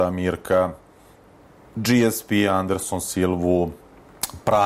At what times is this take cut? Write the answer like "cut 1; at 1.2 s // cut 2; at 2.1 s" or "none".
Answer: none